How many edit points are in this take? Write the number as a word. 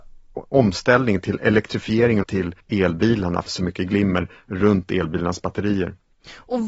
three